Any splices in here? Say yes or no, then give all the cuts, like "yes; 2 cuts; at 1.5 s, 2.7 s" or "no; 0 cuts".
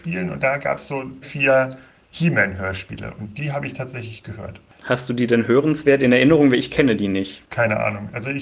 yes; 1 cut; at 1.2 s